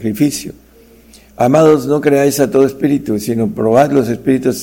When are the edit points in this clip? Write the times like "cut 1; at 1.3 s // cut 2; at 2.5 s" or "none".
none